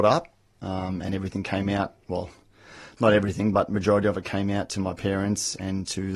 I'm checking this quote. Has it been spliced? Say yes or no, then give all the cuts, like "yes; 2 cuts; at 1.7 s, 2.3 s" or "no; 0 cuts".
no; 0 cuts